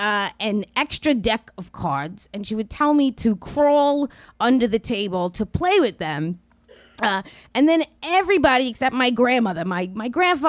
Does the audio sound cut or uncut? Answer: uncut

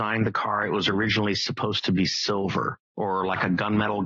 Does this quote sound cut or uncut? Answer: cut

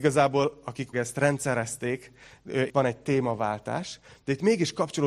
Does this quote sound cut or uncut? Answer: cut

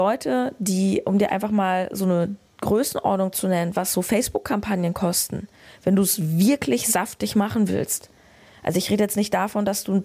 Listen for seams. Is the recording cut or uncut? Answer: uncut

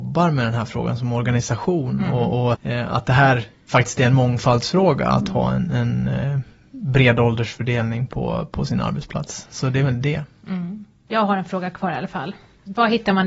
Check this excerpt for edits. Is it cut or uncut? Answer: uncut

